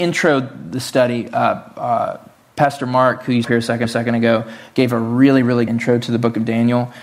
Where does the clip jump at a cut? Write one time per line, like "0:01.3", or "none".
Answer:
0:03.4
0:03.8
0:05.7